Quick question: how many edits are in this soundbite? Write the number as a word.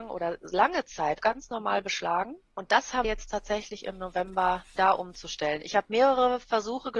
four